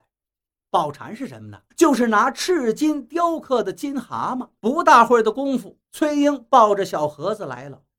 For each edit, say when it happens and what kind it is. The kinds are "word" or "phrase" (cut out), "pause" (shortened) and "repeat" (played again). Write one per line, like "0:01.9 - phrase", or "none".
0:01.7 - pause
0:04.6 - pause
0:05.8 - pause